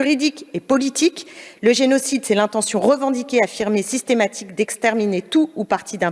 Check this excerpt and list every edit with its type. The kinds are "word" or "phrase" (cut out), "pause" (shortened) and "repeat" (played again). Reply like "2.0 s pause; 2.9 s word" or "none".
none